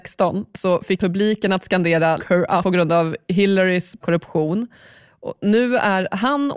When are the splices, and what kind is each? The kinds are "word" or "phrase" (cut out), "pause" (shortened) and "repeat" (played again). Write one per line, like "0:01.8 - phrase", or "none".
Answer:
0:01.0 - word
0:02.2 - word
0:02.6 - word
0:04.0 - word